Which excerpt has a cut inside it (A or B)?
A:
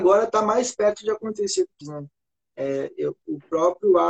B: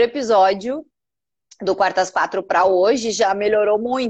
A